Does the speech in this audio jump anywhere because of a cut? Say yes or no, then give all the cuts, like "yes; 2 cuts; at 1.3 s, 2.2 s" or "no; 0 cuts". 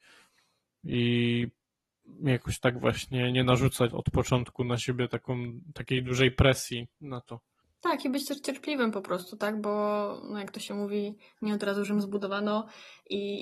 yes; 2 cuts; at 3.9 s, 7.6 s